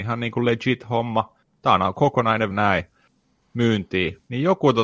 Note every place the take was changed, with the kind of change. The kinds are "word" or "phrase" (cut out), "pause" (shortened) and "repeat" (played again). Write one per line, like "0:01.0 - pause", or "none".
0:02.5 - word